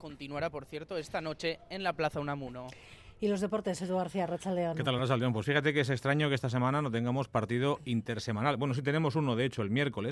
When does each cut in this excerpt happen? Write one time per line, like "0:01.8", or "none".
none